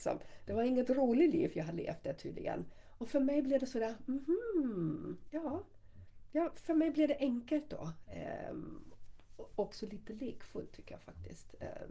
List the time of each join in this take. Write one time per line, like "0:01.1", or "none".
none